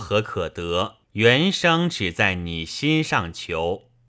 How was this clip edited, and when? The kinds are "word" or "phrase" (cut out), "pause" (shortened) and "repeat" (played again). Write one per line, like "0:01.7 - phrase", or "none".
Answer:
0:01.0 - pause